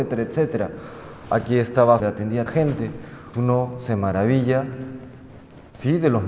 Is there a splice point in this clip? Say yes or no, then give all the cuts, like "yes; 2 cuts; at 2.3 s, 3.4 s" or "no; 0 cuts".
yes; 3 cuts; at 2.0 s, 2.5 s, 3.3 s